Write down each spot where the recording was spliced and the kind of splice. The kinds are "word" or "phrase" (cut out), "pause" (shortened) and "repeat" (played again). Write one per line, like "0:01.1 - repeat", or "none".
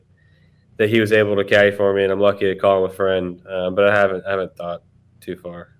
none